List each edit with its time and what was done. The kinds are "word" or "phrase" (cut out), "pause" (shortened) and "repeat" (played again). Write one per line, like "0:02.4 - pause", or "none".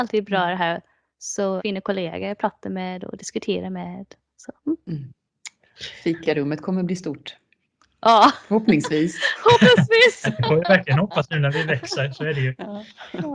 0:01.6 - word
0:04.6 - pause